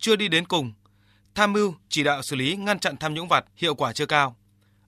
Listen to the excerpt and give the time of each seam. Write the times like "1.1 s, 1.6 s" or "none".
1.8 s, 3.5 s